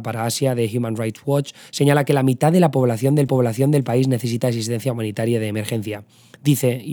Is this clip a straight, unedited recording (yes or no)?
no